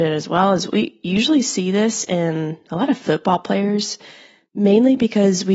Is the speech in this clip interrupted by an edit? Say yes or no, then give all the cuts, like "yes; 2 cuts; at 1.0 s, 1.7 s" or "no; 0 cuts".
no; 0 cuts